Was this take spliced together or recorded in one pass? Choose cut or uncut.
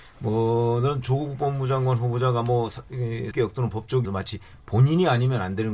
cut